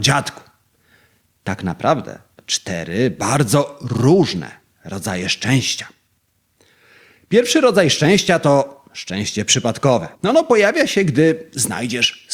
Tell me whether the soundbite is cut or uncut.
cut